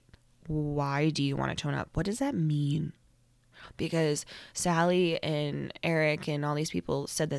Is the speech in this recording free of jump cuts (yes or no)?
yes